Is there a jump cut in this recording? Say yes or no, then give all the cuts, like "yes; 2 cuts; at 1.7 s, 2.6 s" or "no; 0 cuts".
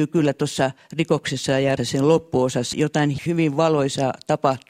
yes; 3 cuts; at 1.8 s, 2.7 s, 3.3 s